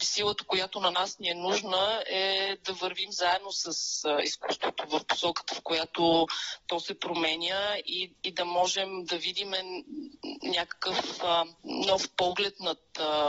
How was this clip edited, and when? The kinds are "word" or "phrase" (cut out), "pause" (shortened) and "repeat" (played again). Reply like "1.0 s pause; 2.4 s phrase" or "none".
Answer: 11.6 s pause